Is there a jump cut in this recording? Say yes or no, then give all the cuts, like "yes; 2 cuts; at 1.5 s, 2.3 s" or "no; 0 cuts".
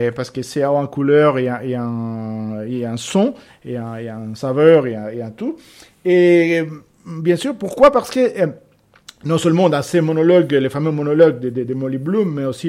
no; 0 cuts